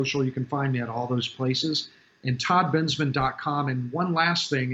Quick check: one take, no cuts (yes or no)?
yes